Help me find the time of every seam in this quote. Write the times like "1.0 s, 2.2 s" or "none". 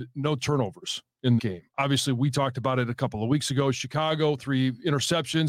1.4 s